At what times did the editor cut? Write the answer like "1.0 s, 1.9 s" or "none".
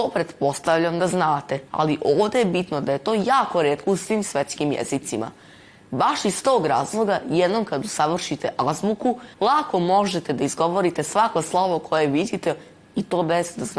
1.7 s, 9.3 s